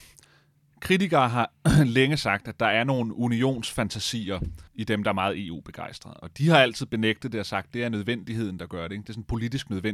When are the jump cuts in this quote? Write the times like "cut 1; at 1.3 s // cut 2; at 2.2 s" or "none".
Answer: cut 1; at 4.7 s